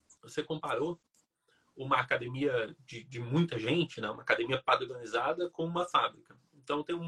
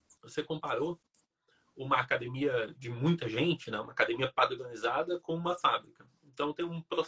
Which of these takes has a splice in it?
second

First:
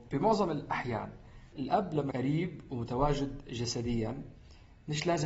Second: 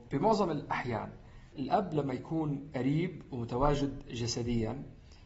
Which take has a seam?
first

